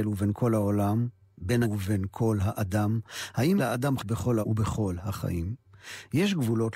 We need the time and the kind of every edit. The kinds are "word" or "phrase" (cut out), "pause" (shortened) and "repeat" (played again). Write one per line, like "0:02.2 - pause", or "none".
0:01.6 - word
0:03.6 - word
0:04.0 - word
0:04.4 - word